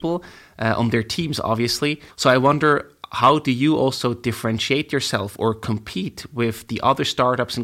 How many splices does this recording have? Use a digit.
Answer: 1